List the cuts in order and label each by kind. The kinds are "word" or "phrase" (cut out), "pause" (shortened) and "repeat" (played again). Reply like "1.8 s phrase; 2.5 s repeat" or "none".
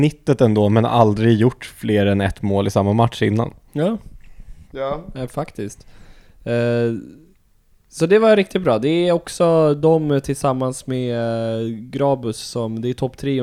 none